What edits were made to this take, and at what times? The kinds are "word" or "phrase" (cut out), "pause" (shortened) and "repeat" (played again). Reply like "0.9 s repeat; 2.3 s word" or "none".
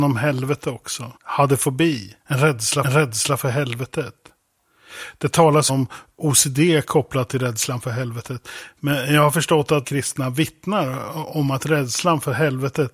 1.2 s pause; 2.2 s pause; 2.8 s repeat; 5.7 s word; 9.8 s phrase